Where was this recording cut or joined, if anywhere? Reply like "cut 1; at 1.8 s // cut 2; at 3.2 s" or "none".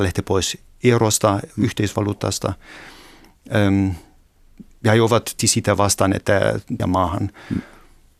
cut 1; at 5.4 s // cut 2; at 6.8 s